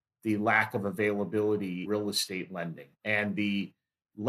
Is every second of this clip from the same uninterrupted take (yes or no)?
no